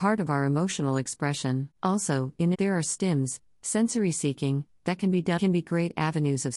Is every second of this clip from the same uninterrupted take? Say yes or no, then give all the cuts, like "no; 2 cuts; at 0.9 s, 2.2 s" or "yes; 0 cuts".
no; 3 cuts; at 1.7 s, 2.5 s, 5.4 s